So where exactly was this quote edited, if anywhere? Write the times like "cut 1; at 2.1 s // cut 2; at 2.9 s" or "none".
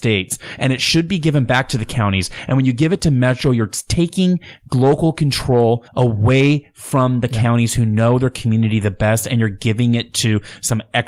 cut 1; at 5.9 s